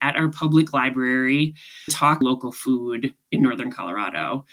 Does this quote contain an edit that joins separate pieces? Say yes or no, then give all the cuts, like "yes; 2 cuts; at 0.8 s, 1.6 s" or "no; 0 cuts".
yes; 2 cuts; at 1.9 s, 2.2 s